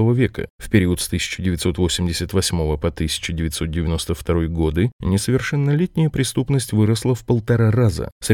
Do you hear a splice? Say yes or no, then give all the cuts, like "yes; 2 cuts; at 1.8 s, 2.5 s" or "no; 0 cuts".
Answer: no; 0 cuts